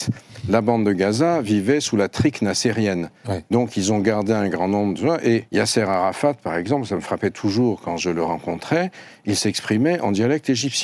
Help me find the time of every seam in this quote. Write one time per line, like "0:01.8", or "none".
0:05.5